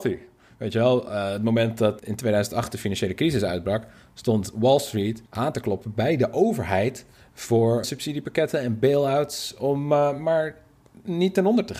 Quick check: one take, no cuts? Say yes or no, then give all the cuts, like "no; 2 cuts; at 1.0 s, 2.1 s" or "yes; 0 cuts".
no; 3 cuts; at 2.0 s, 5.3 s, 7.8 s